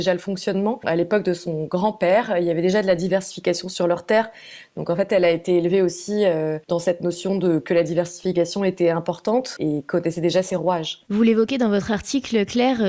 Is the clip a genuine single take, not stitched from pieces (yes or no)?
yes